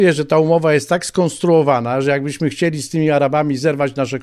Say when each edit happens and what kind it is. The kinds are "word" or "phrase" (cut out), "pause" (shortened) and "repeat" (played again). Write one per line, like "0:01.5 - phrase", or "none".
none